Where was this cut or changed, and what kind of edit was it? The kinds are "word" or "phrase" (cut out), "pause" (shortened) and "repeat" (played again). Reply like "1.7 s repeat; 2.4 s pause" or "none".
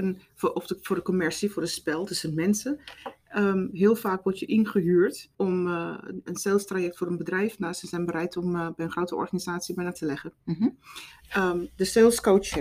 5.3 s pause; 10.0 s phrase; 10.4 s pause